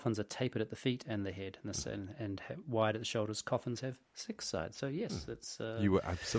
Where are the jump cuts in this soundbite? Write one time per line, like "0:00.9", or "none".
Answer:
none